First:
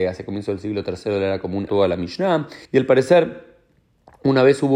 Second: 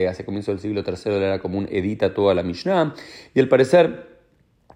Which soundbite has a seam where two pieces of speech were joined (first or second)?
first